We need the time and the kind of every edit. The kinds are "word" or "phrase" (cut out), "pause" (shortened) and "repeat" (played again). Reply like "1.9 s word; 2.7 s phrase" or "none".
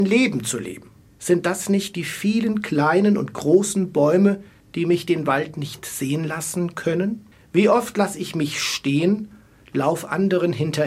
none